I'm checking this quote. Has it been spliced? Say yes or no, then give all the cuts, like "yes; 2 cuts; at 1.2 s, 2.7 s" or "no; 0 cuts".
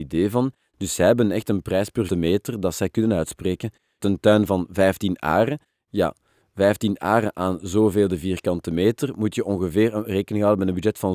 yes; 2 cuts; at 2.1 s, 4.0 s